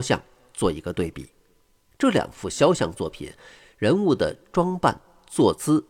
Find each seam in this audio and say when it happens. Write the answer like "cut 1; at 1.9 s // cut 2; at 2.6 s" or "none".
none

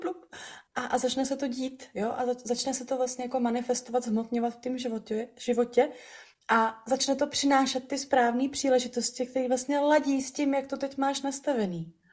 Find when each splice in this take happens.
none

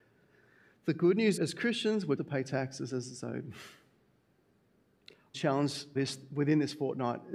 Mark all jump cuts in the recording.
cut 1; at 1.4 s // cut 2; at 2.2 s // cut 3; at 5.3 s // cut 4; at 6.0 s

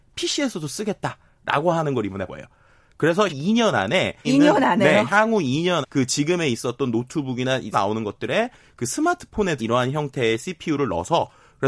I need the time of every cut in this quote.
cut 1; at 2.3 s // cut 2; at 3.3 s // cut 3; at 4.2 s // cut 4; at 5.8 s // cut 5; at 7.7 s // cut 6; at 9.6 s

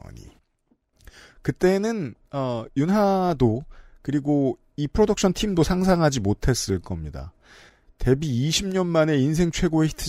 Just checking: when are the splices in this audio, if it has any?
none

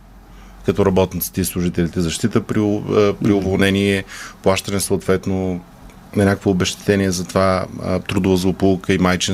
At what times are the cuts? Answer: none

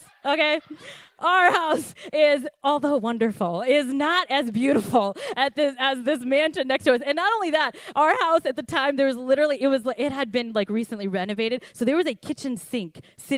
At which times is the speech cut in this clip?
cut 1; at 2.5 s

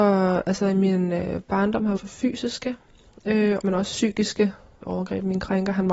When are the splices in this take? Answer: cut 1; at 2.0 s // cut 2; at 3.6 s // cut 3; at 4.8 s

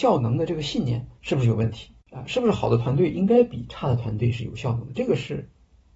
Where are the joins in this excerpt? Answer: cut 1; at 1.2 s // cut 2; at 2.0 s

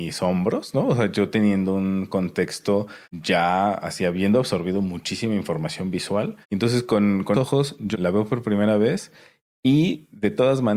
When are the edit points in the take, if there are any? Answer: cut 1; at 3.0 s // cut 2; at 6.4 s // cut 3; at 7.3 s // cut 4; at 7.9 s

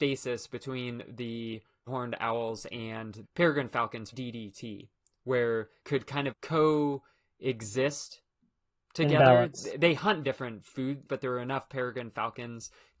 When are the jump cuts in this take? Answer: cut 1; at 1.9 s // cut 2; at 3.2 s // cut 3; at 4.1 s // cut 4; at 5.8 s // cut 5; at 6.3 s // cut 6; at 10.2 s // cut 7; at 11.1 s

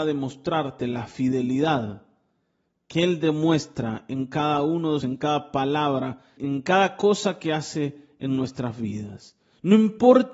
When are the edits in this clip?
cut 1; at 5.0 s // cut 2; at 6.4 s

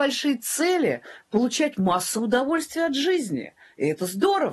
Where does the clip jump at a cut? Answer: none

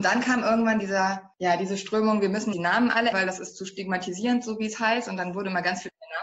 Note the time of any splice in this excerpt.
cut 1; at 2.5 s // cut 2; at 3.1 s

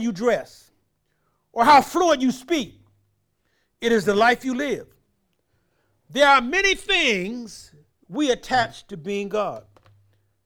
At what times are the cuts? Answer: none

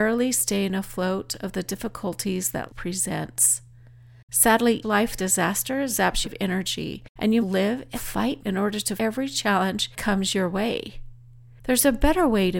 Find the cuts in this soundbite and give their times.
cut 1; at 2.7 s // cut 2; at 4.8 s // cut 3; at 5.2 s // cut 4; at 6.2 s // cut 5; at 7.4 s // cut 6; at 7.9 s // cut 7; at 8.4 s // cut 8; at 9.0 s // cut 9; at 10.0 s

